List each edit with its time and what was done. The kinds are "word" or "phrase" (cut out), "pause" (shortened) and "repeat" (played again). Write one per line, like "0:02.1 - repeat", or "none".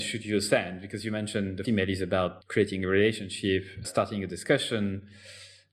0:01.6 - word
0:02.4 - pause
0:03.8 - word